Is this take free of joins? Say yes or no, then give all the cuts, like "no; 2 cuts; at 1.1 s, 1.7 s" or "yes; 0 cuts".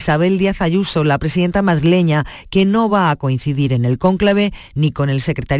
yes; 0 cuts